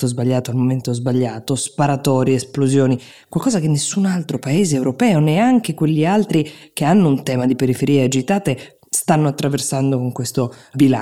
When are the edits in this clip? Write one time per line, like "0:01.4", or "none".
none